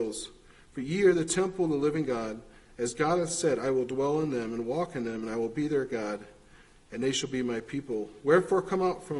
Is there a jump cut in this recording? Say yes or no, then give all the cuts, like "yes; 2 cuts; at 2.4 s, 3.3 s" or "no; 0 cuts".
no; 0 cuts